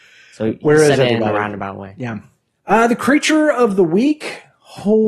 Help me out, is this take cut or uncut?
uncut